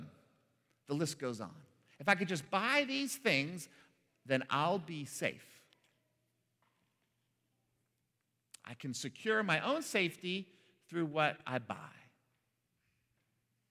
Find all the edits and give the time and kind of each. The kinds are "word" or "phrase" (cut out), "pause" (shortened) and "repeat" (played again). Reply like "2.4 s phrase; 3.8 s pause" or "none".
none

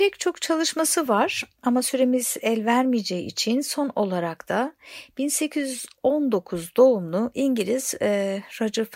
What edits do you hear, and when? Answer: none

